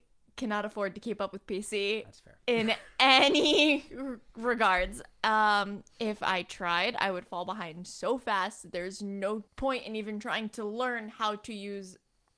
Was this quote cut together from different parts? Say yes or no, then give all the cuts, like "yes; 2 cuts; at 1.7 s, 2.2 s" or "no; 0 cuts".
yes; 1 cut; at 9.5 s